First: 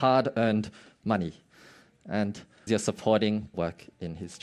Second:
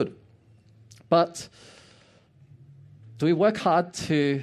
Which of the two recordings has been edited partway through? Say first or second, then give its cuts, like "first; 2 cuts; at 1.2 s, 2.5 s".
first; 2 cuts; at 2.7 s, 3.5 s